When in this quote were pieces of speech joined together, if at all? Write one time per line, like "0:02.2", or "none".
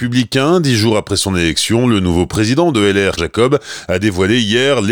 0:03.2